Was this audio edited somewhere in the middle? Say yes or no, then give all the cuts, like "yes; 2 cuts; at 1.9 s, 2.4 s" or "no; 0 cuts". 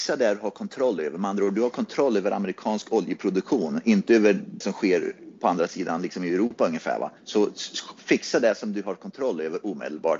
yes; 2 cuts; at 4.6 s, 7.2 s